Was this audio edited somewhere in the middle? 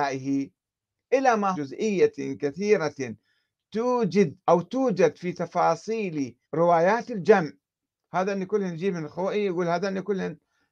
yes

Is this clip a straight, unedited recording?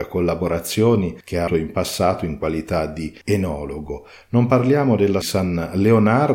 no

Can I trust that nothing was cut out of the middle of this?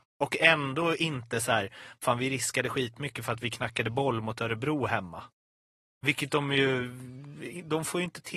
yes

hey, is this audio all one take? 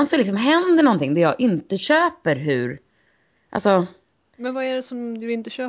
yes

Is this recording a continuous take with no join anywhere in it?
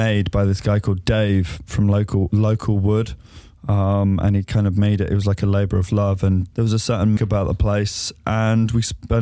no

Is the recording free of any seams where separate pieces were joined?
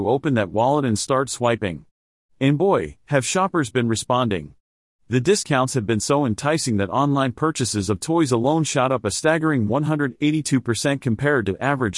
yes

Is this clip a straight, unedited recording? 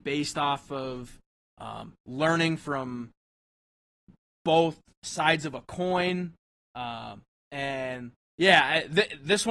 yes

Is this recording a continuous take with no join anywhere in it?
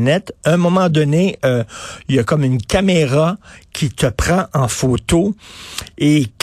yes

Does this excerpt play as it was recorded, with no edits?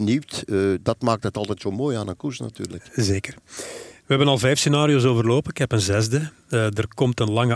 yes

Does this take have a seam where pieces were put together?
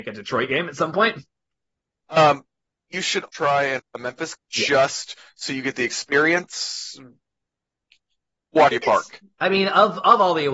yes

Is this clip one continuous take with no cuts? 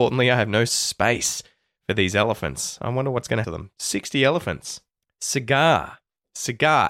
no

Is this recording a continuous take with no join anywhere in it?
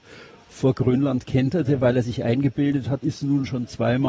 no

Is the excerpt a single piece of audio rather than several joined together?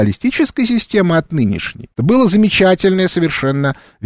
no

